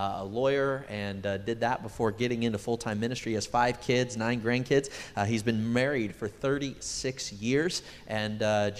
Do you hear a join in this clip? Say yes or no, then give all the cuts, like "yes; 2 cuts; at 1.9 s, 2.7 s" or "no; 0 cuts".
no; 0 cuts